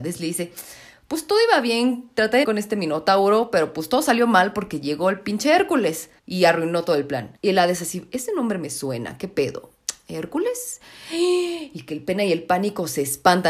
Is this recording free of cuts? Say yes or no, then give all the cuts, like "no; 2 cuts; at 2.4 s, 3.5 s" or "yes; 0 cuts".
no; 3 cuts; at 2.4 s, 6.2 s, 7.4 s